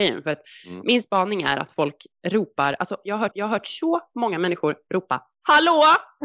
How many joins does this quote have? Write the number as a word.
one